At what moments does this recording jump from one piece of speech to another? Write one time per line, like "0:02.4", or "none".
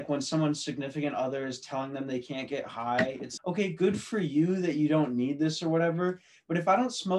0:03.4